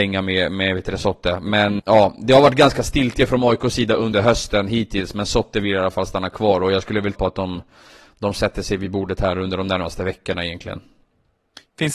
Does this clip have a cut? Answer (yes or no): yes